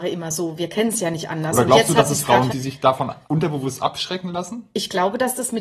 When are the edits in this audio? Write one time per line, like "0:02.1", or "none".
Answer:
0:02.5
0:03.2

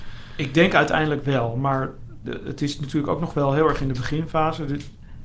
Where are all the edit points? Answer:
none

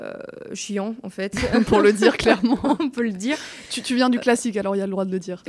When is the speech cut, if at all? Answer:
none

